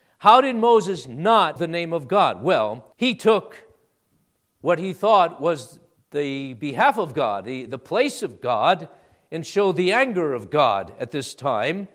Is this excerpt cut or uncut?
cut